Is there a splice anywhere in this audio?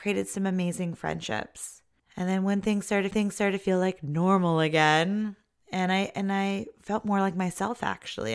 yes; 2 cuts; at 2.0 s, 3.1 s

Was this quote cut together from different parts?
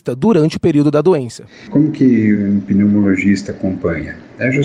no; 0 cuts

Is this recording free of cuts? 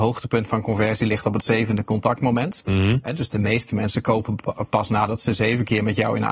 yes; 0 cuts

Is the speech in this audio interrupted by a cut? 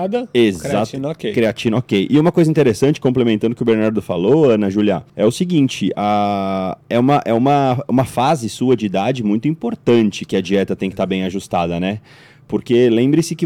yes; 2 cuts; at 5.1 s, 6.8 s

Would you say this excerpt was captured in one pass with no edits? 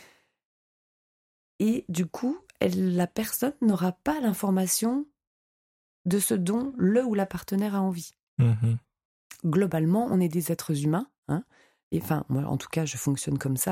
yes; 0 cuts

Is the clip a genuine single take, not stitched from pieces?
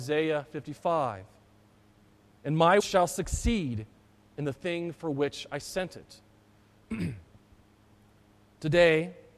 no; 1 cut; at 2.8 s

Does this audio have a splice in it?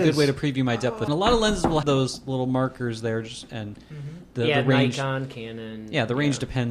yes; 2 cuts; at 1.1 s, 1.8 s

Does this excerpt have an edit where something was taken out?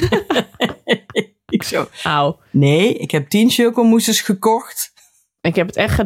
no; 0 cuts

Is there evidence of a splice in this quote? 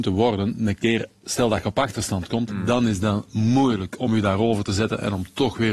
no; 0 cuts

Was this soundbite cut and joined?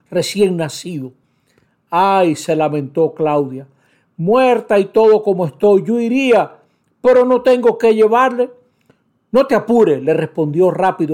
no; 0 cuts

